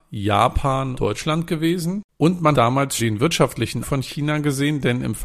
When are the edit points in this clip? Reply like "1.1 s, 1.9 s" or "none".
0.9 s, 2.1 s, 2.5 s, 3.0 s, 3.8 s